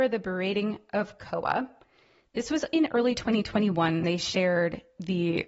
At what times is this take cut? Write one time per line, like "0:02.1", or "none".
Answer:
0:04.0